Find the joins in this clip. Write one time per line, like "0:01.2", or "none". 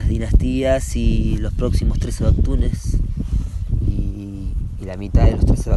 none